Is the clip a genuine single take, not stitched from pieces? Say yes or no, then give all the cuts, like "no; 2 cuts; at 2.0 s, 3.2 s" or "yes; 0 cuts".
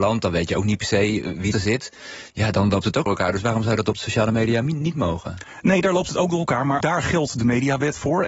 no; 3 cuts; at 1.5 s, 3.1 s, 6.8 s